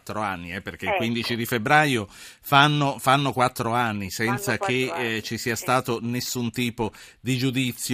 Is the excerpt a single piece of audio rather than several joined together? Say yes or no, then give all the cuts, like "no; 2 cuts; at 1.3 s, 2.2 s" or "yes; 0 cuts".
yes; 0 cuts